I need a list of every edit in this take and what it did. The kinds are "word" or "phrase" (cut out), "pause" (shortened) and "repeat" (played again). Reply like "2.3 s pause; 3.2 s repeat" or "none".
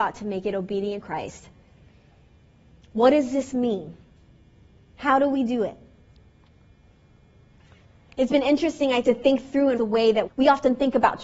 1.0 s word; 9.0 s word; 9.8 s word; 10.3 s word